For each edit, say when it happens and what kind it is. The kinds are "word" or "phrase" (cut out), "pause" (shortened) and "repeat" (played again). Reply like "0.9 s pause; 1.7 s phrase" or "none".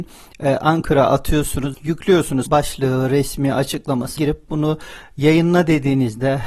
1.7 s word; 2.5 s word; 4.2 s word

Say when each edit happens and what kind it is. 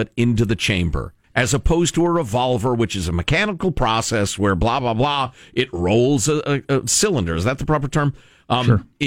1.2 s pause

